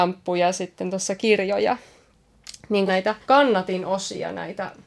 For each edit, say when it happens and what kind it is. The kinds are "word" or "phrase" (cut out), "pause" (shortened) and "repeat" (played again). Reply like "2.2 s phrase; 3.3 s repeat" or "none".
1.2 s word; 2.9 s phrase; 3.2 s pause